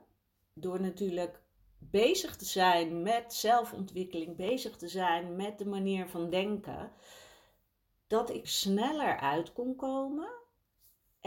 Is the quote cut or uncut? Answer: cut